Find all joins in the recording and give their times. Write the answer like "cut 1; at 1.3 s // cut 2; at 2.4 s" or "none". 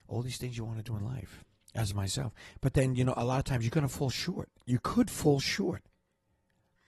none